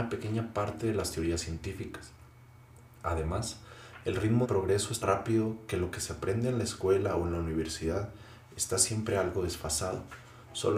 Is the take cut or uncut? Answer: cut